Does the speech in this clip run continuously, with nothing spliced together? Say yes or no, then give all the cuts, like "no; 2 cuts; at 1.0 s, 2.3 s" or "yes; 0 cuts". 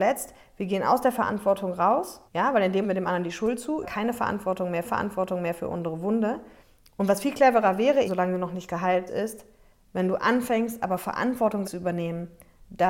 no; 8 cuts; at 2.3 s, 2.8 s, 3.8 s, 4.8 s, 6.6 s, 8.0 s, 9.1 s, 11.6 s